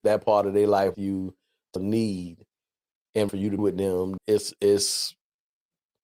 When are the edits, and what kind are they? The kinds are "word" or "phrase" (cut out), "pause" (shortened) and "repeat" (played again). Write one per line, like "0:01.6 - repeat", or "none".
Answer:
0:00.9 - word
0:01.8 - word
0:03.3 - word
0:03.6 - word
0:04.2 - word